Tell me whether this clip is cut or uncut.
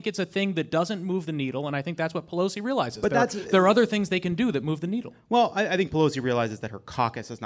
uncut